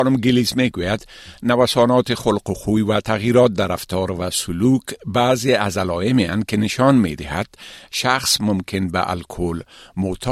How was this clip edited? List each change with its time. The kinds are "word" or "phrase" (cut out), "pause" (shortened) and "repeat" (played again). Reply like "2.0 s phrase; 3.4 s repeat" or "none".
none